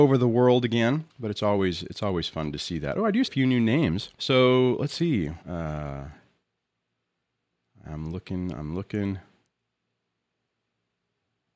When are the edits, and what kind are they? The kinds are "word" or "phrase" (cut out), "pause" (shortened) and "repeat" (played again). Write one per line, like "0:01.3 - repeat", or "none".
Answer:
0:01.1 - pause
0:03.3 - phrase
0:04.1 - pause
0:05.4 - pause